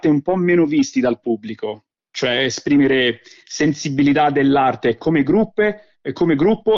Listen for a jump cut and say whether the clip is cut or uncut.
uncut